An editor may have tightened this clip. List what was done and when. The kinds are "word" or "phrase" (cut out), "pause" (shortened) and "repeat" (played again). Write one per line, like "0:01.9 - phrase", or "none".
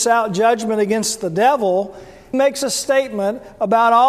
0:02.3 - word